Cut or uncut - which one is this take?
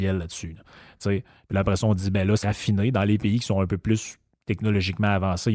cut